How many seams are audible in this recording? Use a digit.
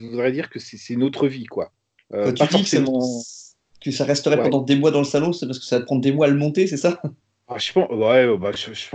0